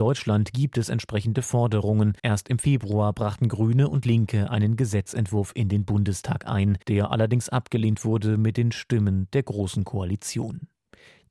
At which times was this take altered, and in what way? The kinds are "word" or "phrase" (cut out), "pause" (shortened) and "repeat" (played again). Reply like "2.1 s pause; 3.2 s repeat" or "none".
2.2 s pause; 6.8 s pause